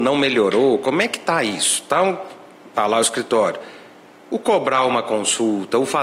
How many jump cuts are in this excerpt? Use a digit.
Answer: 0